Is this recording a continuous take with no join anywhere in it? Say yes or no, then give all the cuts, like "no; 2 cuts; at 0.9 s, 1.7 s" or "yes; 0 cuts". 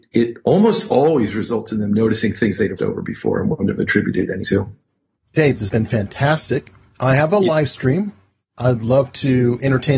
no; 3 cuts; at 2.8 s, 4.4 s, 5.7 s